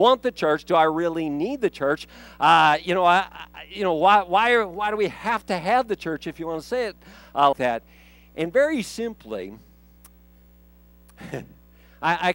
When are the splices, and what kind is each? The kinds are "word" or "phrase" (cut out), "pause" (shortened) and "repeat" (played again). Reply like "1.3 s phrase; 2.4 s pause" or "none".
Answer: 7.5 s word

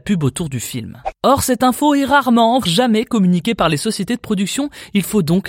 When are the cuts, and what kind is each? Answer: 2.6 s word

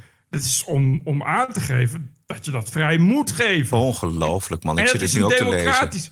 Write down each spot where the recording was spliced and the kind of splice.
none

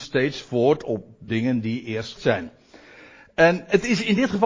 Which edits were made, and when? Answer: 1.3 s word; 2.2 s word

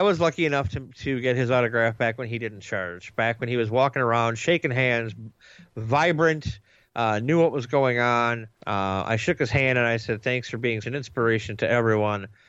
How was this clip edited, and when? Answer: 8.6 s pause; 10.8 s word

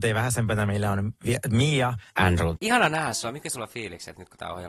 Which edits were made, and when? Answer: 2.1 s pause

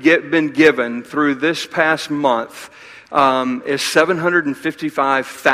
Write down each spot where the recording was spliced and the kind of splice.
none

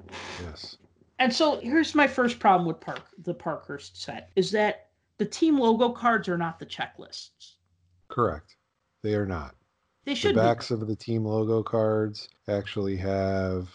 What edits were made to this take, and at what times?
1.6 s word; 4.3 s pause; 12.4 s pause

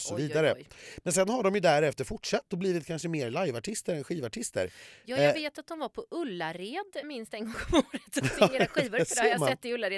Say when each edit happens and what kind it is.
7.0 s word

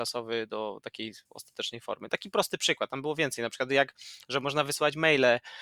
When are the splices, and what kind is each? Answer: 1.2 s pause

